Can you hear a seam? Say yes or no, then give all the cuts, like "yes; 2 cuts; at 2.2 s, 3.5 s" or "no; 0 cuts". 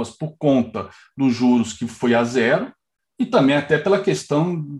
no; 0 cuts